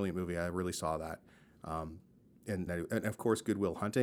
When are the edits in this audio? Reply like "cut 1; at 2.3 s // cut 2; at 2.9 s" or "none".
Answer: cut 1; at 2.7 s